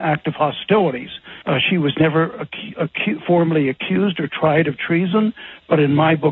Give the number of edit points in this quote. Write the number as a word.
one